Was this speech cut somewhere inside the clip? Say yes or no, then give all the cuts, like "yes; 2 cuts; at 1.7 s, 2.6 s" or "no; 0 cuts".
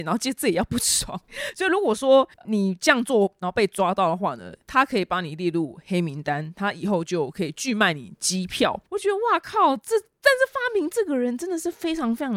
yes; 2 cuts; at 2.3 s, 8.9 s